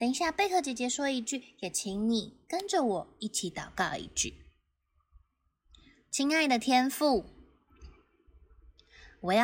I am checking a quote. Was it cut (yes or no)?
no